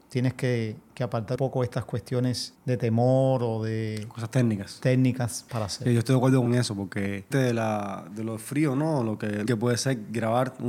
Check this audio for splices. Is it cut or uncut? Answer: cut